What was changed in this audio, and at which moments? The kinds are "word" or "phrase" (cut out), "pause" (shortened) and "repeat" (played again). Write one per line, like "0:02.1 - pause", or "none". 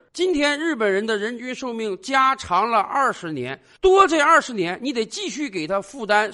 none